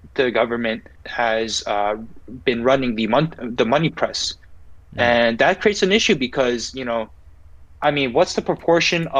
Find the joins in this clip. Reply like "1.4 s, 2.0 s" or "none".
1.0 s